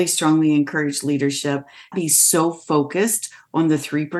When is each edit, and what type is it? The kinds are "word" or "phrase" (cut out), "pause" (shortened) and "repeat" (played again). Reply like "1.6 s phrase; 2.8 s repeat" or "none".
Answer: 1.9 s phrase